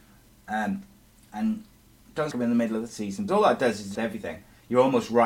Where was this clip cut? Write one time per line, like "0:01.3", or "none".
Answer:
0:02.3
0:03.3
0:03.9